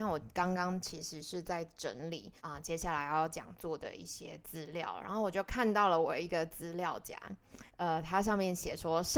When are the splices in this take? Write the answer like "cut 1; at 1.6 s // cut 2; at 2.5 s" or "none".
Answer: cut 1; at 2.4 s // cut 2; at 7.7 s